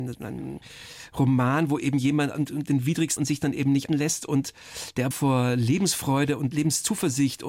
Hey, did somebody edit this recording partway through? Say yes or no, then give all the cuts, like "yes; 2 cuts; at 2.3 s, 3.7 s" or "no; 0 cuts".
yes; 3 cuts; at 3.2 s, 3.9 s, 5.1 s